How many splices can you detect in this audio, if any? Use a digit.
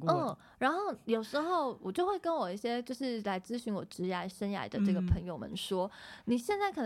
0